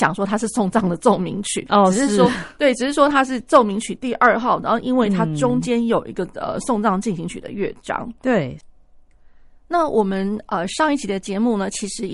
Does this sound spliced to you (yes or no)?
no